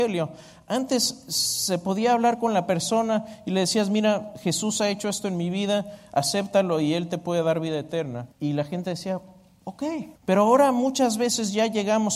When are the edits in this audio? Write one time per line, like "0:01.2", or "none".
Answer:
0:08.3
0:10.2